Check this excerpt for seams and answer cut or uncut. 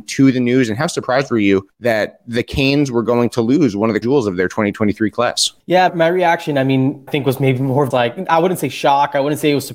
cut